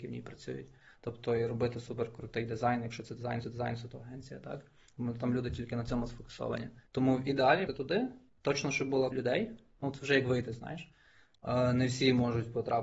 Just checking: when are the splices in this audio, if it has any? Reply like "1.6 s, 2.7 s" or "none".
3.4 s, 6.9 s, 7.7 s, 9.1 s